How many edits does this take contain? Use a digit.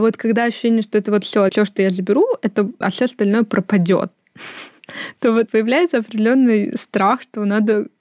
3